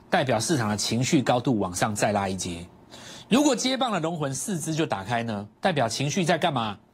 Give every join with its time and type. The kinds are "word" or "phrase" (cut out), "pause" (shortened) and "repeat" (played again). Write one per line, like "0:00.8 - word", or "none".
0:05.6 - pause